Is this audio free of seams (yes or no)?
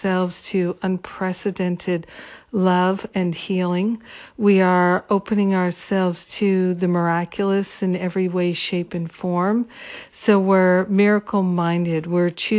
yes